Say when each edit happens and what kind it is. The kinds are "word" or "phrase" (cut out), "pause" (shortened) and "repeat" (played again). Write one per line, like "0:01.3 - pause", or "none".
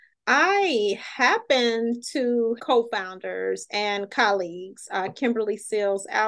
0:02.6 - phrase